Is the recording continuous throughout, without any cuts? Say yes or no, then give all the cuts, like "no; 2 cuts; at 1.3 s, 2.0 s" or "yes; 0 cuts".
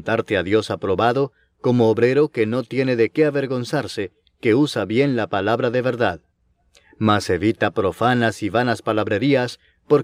yes; 0 cuts